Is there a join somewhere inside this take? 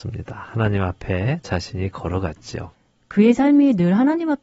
no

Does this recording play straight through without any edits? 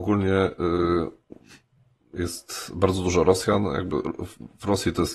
yes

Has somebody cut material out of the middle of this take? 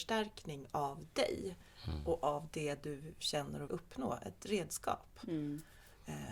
yes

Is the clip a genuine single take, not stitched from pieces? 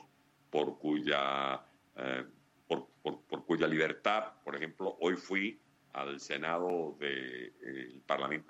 yes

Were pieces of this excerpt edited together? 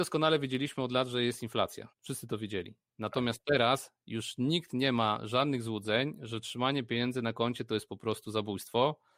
yes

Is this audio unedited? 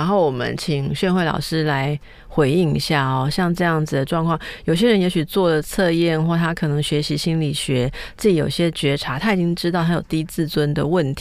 yes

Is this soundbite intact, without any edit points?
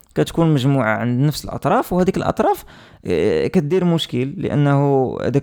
yes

